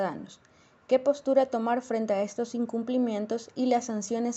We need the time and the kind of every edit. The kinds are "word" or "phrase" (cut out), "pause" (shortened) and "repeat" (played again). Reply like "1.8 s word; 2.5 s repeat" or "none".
none